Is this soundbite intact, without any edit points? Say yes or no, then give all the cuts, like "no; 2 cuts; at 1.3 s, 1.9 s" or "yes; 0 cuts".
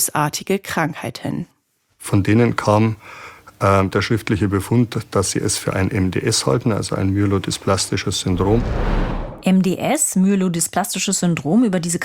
yes; 0 cuts